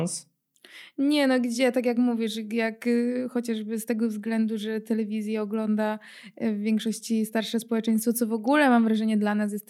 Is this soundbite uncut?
yes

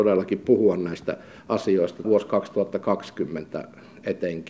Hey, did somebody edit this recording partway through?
yes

